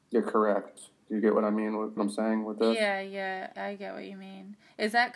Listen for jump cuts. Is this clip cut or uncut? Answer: cut